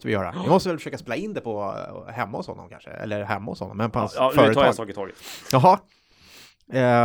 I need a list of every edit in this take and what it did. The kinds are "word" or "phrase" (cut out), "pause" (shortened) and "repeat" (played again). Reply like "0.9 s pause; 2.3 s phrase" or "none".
none

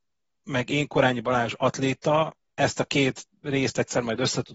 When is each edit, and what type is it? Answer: 2.5 s pause

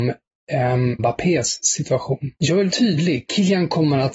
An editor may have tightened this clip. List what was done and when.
1.0 s word; 2.4 s pause; 2.7 s word

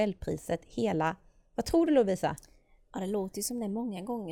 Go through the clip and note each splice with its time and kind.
none

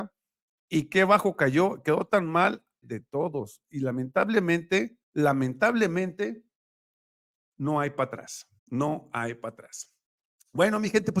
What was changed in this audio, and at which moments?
2.8 s word; 5.0 s pause; 8.6 s pause

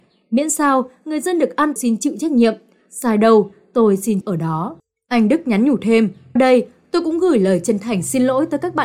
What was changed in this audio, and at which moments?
1.8 s phrase; 4.2 s word; 6.4 s word

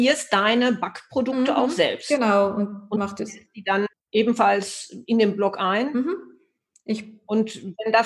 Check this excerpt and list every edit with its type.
3.9 s pause

